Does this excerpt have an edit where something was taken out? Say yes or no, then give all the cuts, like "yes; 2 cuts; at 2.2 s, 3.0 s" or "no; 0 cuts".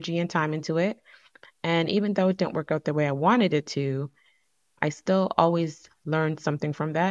no; 0 cuts